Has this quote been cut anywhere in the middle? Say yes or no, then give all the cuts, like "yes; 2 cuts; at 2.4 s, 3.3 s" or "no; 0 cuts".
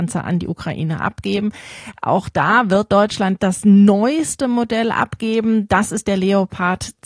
yes; 1 cut; at 3.4 s